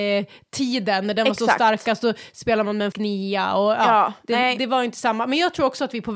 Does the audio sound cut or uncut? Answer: cut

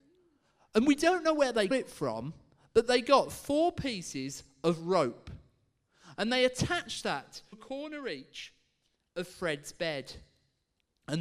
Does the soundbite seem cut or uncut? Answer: cut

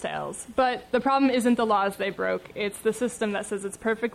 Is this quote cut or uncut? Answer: uncut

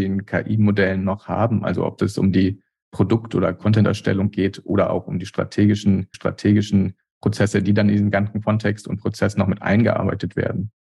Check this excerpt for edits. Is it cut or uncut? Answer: cut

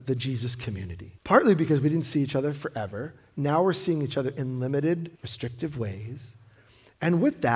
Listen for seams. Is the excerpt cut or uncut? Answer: cut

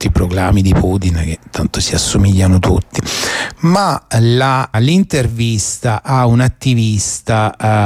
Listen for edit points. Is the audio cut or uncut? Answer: cut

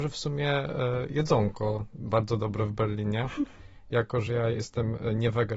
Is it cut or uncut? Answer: uncut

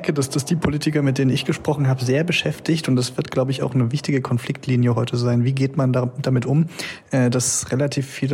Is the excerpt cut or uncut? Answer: uncut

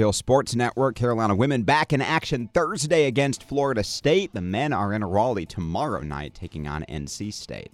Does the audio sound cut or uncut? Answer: uncut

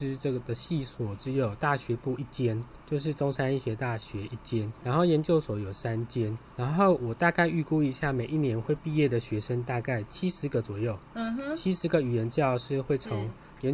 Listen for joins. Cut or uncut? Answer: cut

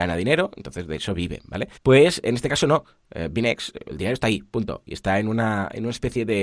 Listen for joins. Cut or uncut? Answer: cut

